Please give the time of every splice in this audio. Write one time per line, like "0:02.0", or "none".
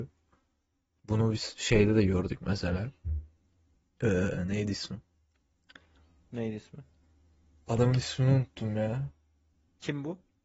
none